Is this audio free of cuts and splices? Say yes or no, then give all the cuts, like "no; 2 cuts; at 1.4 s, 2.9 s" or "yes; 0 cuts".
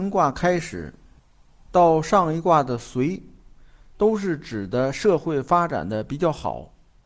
yes; 0 cuts